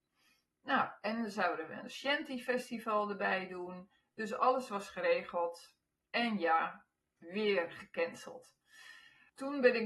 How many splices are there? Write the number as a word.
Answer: zero